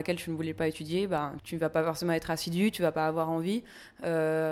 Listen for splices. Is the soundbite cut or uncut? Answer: cut